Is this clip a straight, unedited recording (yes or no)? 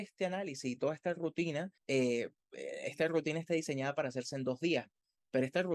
no